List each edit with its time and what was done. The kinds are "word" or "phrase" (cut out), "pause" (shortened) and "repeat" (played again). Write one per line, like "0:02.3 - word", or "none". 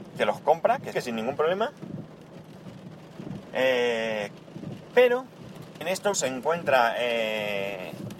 0:00.9 - word
0:05.8 - word
0:06.1 - word